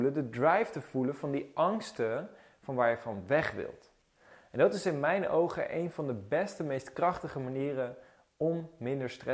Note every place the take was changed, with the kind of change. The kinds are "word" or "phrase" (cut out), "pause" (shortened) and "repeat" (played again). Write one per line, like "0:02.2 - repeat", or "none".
none